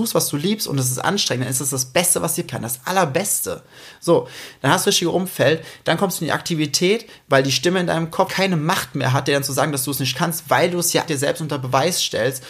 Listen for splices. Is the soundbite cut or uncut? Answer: cut